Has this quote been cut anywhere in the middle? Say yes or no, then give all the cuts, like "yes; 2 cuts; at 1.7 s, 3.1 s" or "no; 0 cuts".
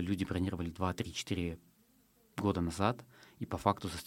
no; 0 cuts